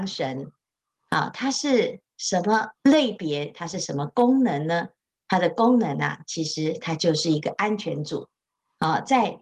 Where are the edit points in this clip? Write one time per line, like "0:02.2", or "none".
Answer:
0:02.7